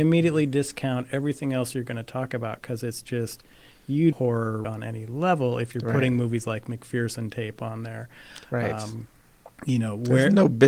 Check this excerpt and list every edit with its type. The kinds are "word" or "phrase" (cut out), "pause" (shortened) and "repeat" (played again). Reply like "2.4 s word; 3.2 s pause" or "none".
4.1 s phrase; 4.6 s word